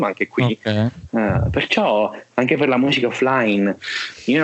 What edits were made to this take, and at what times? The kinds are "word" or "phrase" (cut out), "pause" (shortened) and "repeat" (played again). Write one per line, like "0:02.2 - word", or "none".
none